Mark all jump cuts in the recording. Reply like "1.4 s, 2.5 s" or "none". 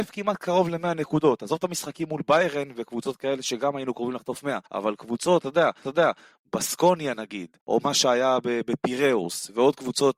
4.7 s, 5.8 s, 7.6 s